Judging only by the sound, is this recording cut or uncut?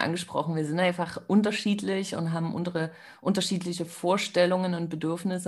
uncut